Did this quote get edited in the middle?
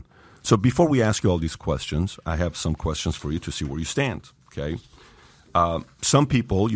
no; 0 cuts

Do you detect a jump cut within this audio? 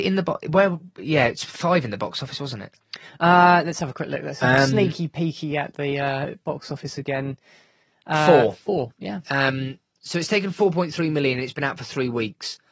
no; 0 cuts

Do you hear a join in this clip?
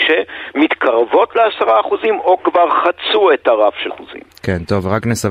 yes; 1 cut; at 3.9 s

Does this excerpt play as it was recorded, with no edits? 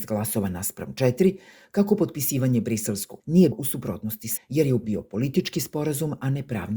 no; 4 cuts; at 3.2 s, 3.5 s, 4.4 s, 4.8 s

